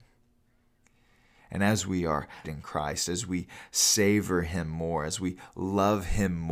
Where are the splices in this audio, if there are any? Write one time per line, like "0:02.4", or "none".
0:02.4